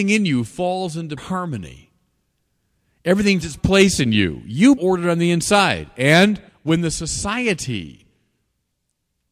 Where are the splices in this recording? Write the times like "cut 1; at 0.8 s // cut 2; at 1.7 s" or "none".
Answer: cut 1; at 1.2 s // cut 2; at 3.4 s // cut 3; at 4.8 s // cut 4; at 6.5 s